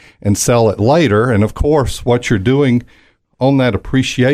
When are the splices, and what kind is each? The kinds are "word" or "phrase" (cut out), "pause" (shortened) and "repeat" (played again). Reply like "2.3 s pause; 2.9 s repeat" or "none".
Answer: none

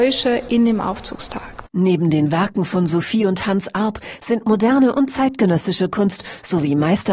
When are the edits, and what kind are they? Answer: none

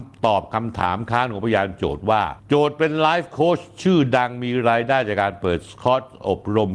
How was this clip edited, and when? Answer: 2.4 s pause

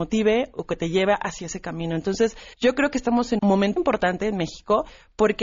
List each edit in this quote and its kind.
2.5 s pause; 3.4 s word; 3.8 s word

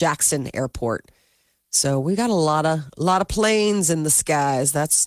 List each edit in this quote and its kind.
none

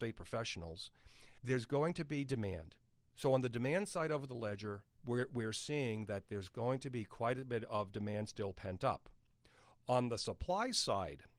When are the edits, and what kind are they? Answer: 1.4 s pause

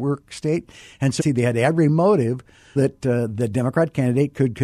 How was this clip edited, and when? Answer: 1.2 s phrase; 2.8 s word

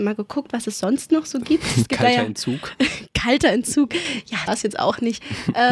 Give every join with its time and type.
4.5 s phrase

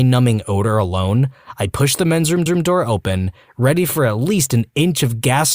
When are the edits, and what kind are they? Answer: 2.5 s repeat

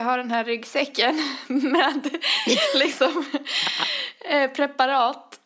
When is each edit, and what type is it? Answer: none

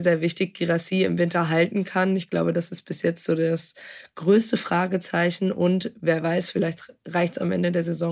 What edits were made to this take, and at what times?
none

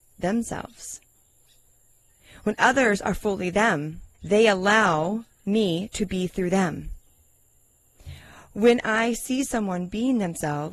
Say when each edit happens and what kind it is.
4.1 s pause; 5.3 s pause

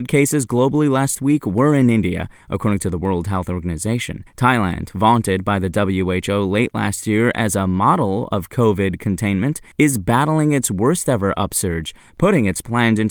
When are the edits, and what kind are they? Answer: 4.3 s pause; 9.7 s pause

